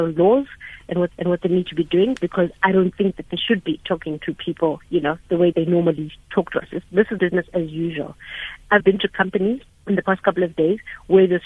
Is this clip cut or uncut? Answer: cut